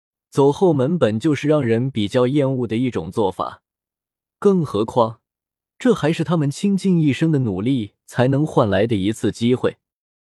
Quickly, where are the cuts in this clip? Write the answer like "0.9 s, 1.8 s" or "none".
none